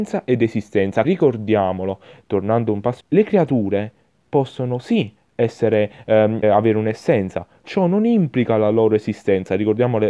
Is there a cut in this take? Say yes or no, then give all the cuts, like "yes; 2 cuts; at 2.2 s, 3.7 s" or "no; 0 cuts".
yes; 4 cuts; at 1.0 s, 3.0 s, 6.4 s, 7.6 s